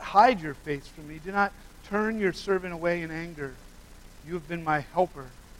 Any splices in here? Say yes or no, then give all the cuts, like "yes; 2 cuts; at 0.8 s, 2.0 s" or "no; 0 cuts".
no; 0 cuts